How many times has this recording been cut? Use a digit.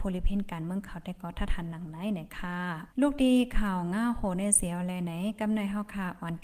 1